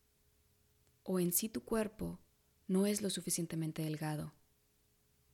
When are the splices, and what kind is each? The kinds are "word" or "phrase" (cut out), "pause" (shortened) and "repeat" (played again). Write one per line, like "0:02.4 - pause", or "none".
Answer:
none